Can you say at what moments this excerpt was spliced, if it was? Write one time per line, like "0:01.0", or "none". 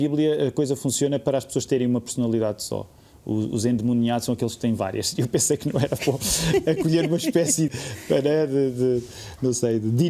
0:07.7